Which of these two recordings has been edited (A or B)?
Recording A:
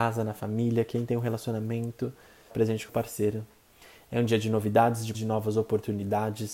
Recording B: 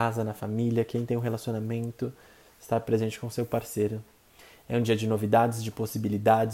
A